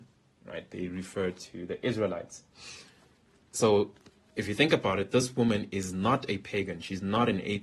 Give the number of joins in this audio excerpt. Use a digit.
0